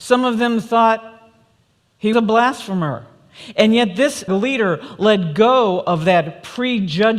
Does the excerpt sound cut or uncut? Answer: cut